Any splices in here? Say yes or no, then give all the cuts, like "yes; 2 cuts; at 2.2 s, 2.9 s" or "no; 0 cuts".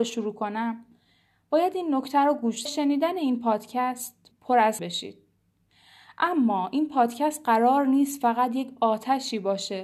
yes; 3 cuts; at 2.7 s, 4.3 s, 4.8 s